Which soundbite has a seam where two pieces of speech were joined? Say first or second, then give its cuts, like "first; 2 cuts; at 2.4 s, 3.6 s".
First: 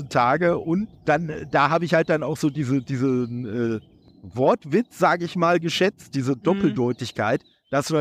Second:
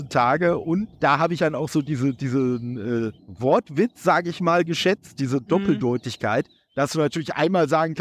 second; 3 cuts; at 1.0 s, 1.4 s, 3.2 s